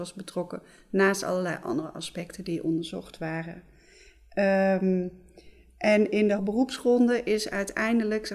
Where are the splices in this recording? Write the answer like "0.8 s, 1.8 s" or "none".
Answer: 6.4 s